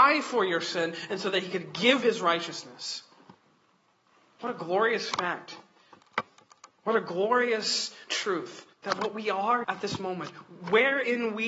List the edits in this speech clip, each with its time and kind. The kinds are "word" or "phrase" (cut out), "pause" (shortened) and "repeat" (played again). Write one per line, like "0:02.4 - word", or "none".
0:02.0 - word
0:08.7 - pause
0:09.6 - word